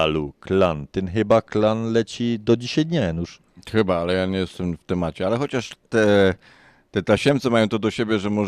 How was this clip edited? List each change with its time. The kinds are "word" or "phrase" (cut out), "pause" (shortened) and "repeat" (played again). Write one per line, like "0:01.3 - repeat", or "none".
none